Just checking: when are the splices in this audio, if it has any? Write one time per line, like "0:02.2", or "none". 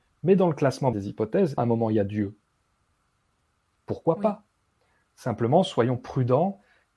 0:00.9
0:01.6